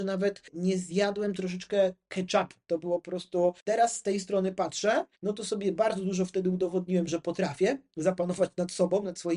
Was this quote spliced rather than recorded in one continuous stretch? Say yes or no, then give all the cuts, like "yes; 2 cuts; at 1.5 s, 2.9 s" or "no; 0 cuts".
yes; 2 cuts; at 3.6 s, 5.1 s